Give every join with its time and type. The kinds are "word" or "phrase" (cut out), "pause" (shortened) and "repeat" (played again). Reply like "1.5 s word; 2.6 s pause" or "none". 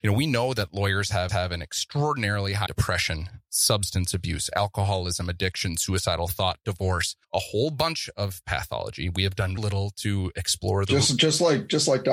1.3 s repeat; 2.7 s phrase; 7.2 s pause; 9.6 s word